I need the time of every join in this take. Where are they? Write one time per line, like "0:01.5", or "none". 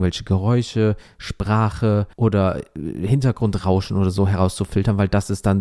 0:02.1